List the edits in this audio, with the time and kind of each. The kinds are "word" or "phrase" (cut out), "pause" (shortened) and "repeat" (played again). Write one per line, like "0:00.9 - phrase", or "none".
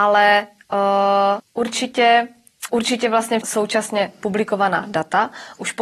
0:01.4 - word
0:02.7 - word
0:03.4 - word